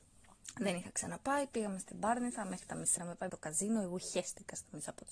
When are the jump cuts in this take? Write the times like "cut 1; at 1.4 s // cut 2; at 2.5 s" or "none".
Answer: cut 1; at 3.0 s // cut 2; at 3.3 s